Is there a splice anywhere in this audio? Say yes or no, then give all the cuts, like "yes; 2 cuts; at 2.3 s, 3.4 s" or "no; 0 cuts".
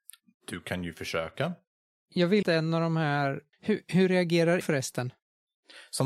yes; 3 cuts; at 2.4 s, 3.5 s, 4.6 s